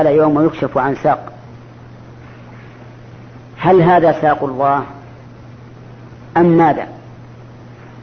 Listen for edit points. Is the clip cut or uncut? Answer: uncut